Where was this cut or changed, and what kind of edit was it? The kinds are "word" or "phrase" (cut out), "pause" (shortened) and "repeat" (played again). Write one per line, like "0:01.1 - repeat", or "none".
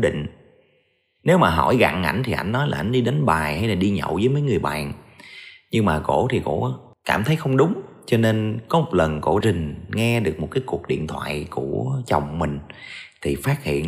0:09.4 - word